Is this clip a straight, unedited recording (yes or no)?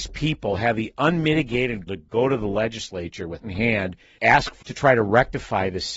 no